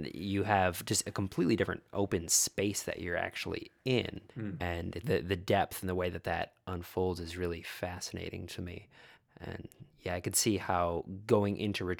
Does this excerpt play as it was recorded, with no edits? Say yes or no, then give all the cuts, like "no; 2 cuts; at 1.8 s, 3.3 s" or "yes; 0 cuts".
no; 3 cuts; at 4.3 s, 5.0 s, 9.9 s